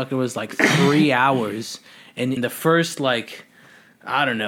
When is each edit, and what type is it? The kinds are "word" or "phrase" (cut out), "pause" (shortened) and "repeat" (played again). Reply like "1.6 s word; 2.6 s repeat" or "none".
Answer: 2.4 s word